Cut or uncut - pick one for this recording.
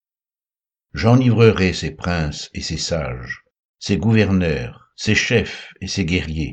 uncut